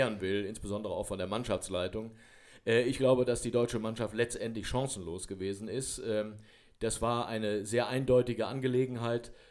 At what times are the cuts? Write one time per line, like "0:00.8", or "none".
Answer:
none